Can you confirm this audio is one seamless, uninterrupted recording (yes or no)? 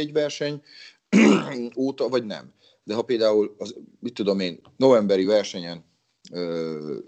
yes